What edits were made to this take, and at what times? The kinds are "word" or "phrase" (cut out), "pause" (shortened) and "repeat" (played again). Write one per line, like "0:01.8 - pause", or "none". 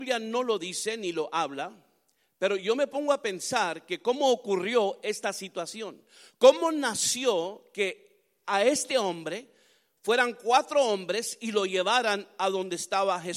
none